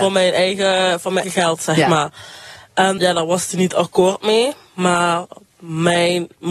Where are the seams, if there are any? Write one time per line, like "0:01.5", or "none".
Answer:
0:01.2
0:03.0